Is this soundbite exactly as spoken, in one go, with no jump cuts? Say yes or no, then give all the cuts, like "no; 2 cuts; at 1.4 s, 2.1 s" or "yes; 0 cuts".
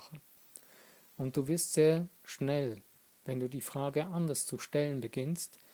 yes; 0 cuts